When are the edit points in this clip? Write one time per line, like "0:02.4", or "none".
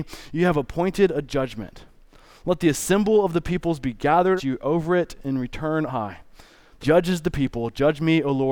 0:04.4
0:05.9
0:06.8